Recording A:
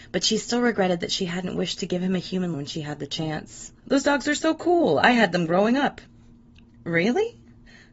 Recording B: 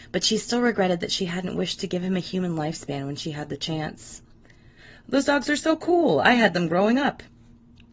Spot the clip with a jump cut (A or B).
A